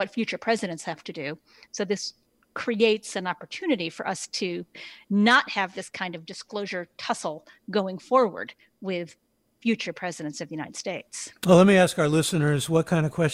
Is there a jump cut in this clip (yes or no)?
no